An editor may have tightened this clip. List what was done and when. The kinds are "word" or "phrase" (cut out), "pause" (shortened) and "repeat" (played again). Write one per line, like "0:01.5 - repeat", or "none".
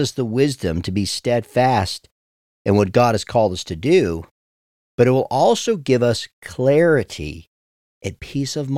none